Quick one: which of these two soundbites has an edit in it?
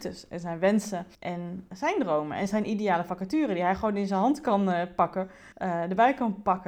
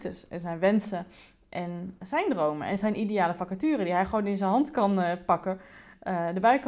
first; 2 cuts; at 1.1 s, 5.5 s

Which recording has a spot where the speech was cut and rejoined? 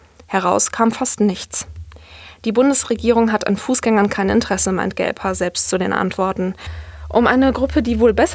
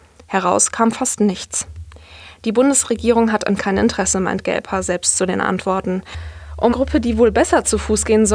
second; 2 cuts; at 3.6 s, 6.7 s

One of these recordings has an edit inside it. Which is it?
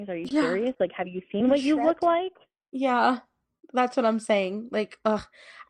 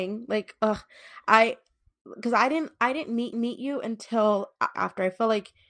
second; 2 cuts; at 3.3 s, 4.7 s

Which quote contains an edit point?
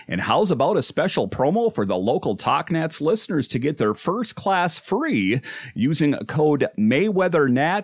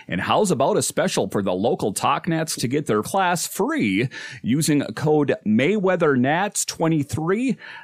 second; 3 cuts; at 1.3 s, 2.6 s, 3.0 s

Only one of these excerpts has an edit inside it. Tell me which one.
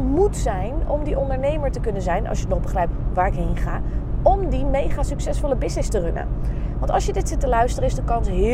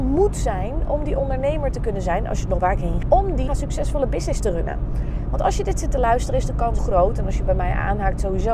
second; 4 cuts; at 2.6 s, 3.0 s, 3.5 s, 6.8 s

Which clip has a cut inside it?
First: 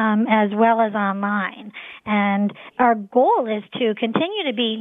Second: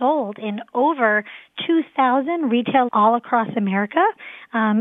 second; 1 cut; at 2.9 s

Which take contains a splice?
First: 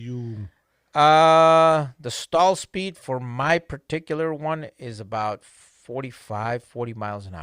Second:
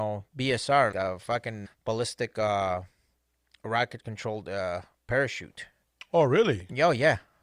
second; 2 cuts; at 0.9 s, 1.6 s

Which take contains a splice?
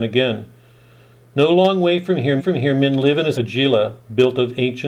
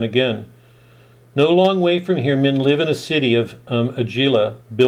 first; 2 cuts; at 2.4 s, 3.3 s

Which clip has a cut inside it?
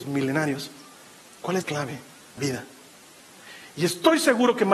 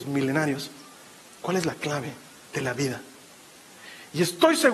first; 2 cuts; at 1.6 s, 2.4 s

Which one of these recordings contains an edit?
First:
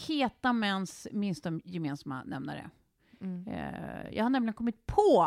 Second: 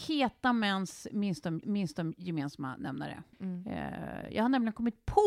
second; 2 cuts; at 1.6 s, 3.3 s

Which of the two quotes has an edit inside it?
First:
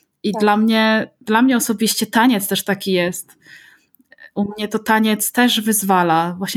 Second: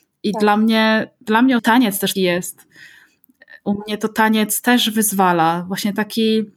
second; 2 cuts; at 1.6 s, 2.2 s

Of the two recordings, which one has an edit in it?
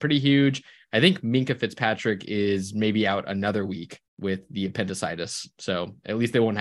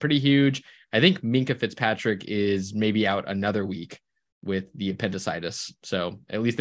first; 1 cut; at 4.1 s

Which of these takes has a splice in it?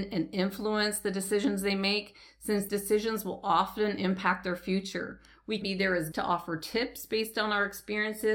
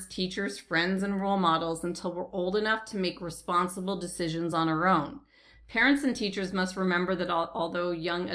first; 3 cuts; at 2.7 s, 5.6 s, 6.1 s

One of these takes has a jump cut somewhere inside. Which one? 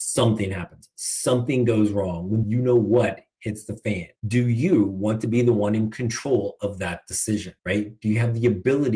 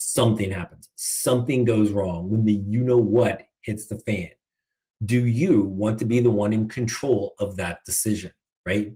first; 3 cuts; at 2.4 s, 4.2 s, 7.6 s

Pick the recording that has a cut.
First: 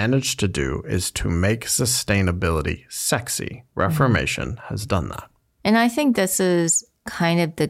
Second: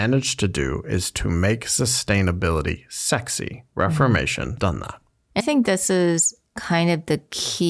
second; 2 cuts; at 4.6 s, 5.4 s

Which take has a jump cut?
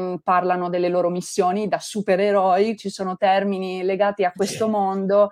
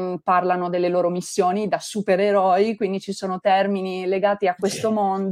first; 1 cut; at 2.8 s

